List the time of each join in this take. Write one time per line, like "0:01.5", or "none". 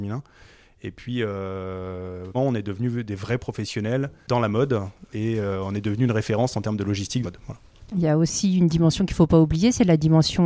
0:02.3
0:07.2